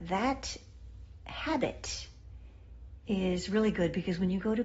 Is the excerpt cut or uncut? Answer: uncut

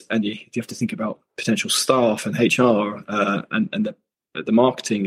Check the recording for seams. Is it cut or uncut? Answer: cut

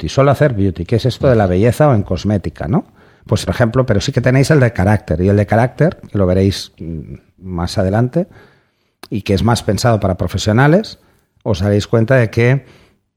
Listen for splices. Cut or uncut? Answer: cut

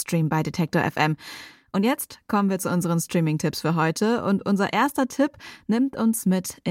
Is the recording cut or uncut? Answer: uncut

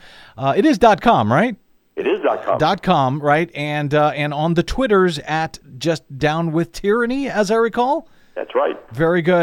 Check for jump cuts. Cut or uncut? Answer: uncut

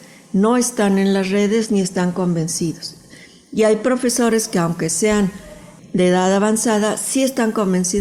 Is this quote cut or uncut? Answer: uncut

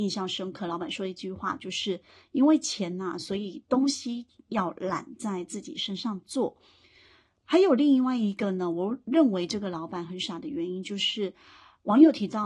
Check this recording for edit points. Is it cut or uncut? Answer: uncut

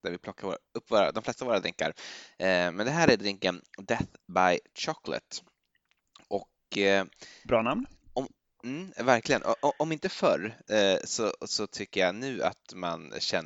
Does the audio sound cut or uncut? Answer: uncut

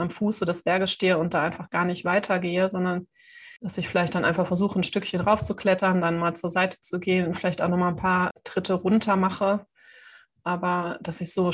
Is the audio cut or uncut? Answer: cut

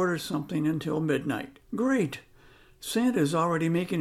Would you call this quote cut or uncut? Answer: cut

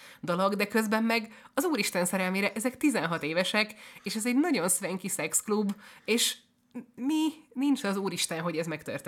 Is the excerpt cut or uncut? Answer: uncut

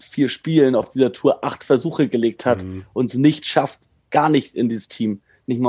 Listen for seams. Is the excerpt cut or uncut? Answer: uncut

